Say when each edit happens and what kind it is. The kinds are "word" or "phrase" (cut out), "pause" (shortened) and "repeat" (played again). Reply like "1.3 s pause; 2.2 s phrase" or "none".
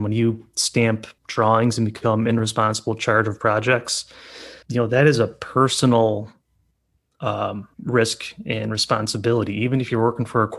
1.2 s pause; 4.6 s pause; 7.7 s pause